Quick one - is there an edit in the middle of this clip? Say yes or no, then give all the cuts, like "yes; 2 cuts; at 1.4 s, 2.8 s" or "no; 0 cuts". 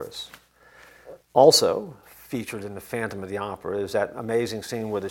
yes; 1 cut; at 1.2 s